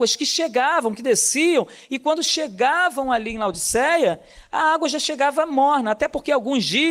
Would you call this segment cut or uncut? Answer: uncut